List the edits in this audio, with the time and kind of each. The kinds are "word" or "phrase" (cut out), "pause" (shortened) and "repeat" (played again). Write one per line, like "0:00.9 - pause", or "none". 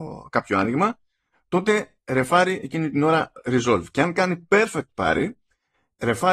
none